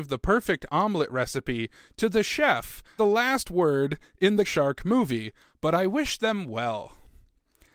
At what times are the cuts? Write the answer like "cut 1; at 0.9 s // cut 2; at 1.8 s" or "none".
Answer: cut 1; at 3.0 s // cut 2; at 4.4 s